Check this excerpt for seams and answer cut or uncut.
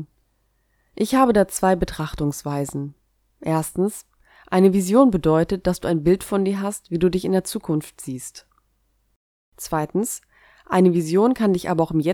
uncut